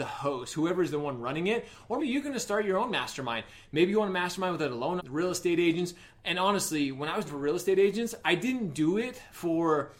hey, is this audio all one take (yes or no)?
no